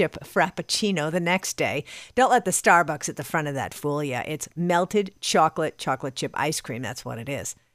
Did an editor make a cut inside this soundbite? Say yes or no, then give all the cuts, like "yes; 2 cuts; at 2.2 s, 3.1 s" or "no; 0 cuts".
no; 0 cuts